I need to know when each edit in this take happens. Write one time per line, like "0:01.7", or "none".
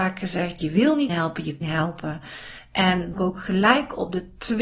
0:01.1
0:01.6
0:03.1